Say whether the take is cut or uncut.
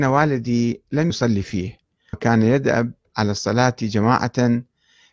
cut